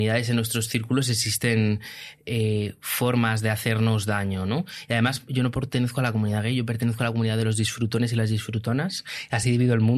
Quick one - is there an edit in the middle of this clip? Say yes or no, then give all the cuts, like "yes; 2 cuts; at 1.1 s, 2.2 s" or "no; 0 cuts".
no; 0 cuts